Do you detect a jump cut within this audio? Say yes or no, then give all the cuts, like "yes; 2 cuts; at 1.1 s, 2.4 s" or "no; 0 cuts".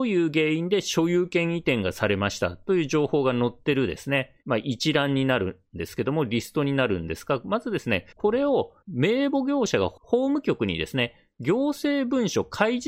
yes; 1 cut; at 4.4 s